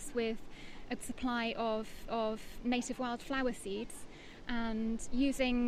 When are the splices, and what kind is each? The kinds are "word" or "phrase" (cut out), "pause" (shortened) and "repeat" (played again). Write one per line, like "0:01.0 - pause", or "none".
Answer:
0:01.0 - word
0:02.1 - repeat